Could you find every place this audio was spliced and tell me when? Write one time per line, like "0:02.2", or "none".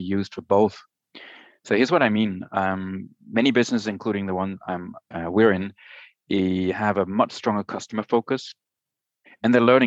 none